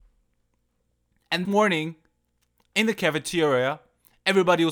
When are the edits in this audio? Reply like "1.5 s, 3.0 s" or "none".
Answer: 1.4 s